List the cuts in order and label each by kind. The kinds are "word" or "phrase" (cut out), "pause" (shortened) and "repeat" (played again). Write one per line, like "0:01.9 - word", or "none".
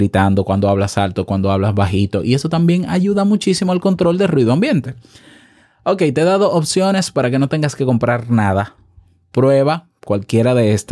none